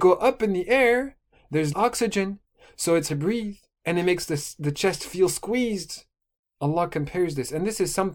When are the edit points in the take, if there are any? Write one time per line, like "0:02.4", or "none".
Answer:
0:01.7
0:03.1
0:06.4